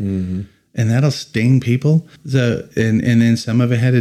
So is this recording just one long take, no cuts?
no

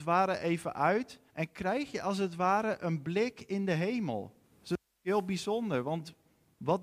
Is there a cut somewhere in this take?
yes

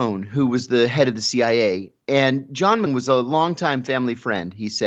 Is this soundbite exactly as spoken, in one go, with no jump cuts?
no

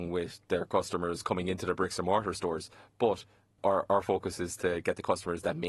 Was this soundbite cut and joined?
yes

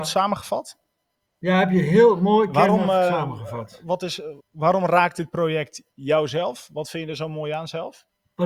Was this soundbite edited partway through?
yes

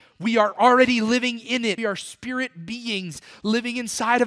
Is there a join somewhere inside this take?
yes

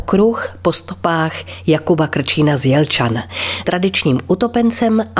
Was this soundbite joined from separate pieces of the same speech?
yes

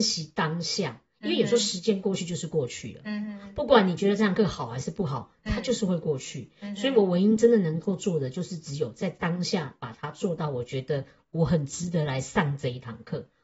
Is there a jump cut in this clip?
no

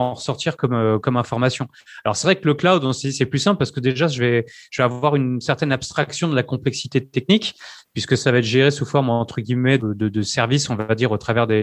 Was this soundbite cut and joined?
yes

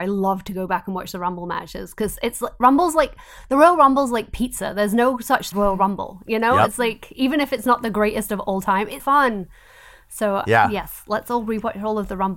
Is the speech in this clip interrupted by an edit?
yes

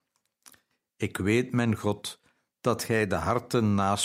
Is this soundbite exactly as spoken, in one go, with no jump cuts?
yes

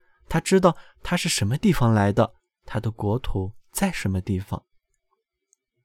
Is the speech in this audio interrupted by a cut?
no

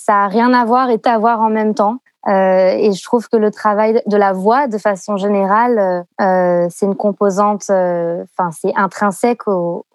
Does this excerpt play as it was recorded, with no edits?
no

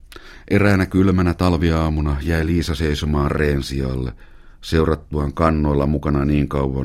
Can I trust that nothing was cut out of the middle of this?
yes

